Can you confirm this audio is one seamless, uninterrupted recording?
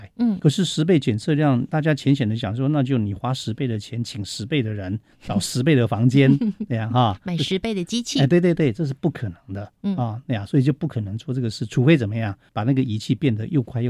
yes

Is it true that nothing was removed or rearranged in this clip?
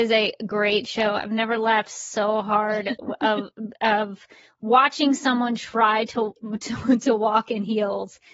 yes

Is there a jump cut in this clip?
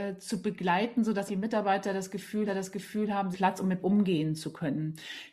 yes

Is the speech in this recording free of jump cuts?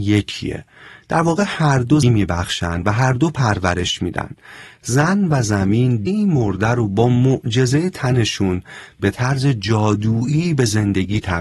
no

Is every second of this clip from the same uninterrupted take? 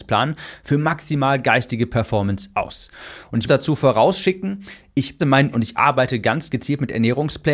no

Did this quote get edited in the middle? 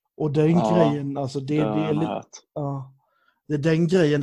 no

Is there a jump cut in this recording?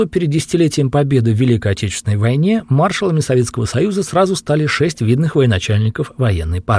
no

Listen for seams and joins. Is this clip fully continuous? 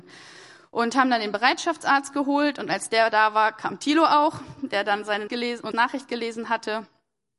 no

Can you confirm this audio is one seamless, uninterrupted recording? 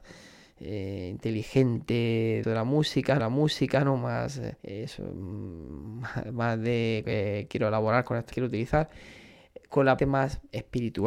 no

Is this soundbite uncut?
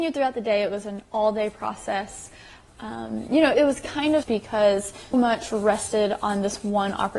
no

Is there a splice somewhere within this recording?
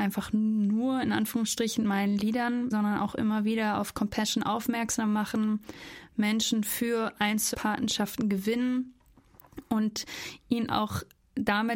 yes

